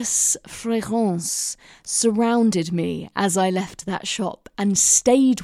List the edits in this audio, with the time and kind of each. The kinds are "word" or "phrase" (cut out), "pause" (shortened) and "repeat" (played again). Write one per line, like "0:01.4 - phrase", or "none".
none